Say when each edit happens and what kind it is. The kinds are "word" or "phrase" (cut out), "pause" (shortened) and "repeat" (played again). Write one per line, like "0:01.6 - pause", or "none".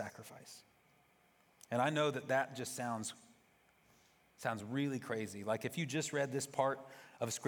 none